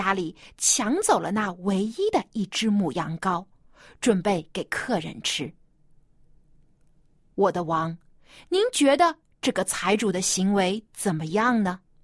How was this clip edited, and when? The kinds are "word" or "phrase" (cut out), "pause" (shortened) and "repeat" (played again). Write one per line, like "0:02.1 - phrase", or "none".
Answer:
none